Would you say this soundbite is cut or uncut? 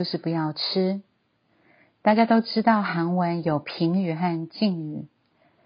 uncut